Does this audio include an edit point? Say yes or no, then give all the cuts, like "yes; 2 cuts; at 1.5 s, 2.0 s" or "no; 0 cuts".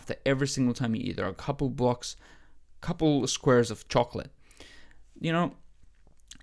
no; 0 cuts